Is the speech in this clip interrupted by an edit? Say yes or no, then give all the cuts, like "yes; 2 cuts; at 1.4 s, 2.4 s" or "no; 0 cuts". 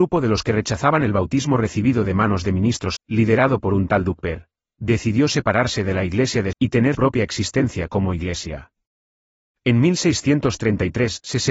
yes; 3 cuts; at 3.0 s, 6.5 s, 6.9 s